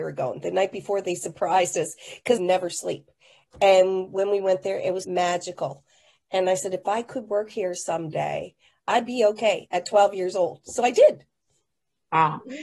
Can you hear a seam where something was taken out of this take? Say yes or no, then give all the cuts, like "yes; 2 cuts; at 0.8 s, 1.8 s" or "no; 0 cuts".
yes; 2 cuts; at 2.4 s, 5.0 s